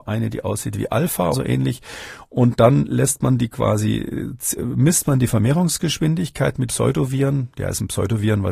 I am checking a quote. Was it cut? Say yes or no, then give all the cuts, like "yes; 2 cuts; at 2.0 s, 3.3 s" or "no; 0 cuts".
yes; 3 cuts; at 1.3 s, 4.6 s, 6.7 s